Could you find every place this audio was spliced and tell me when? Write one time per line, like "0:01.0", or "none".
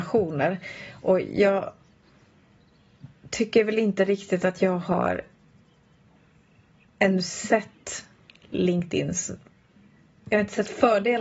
none